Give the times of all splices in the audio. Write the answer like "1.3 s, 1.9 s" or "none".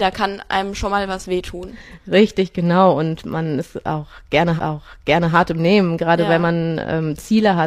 4.6 s